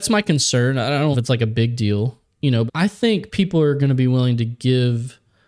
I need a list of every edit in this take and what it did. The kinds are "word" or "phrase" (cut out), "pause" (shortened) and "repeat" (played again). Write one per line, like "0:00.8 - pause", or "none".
0:01.1 - word
0:02.7 - word